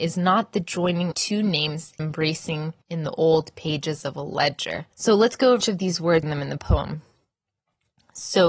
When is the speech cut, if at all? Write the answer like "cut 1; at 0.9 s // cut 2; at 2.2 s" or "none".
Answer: cut 1; at 1.1 s // cut 2; at 2.0 s // cut 3; at 2.8 s // cut 4; at 4.9 s // cut 5; at 5.6 s // cut 6; at 6.2 s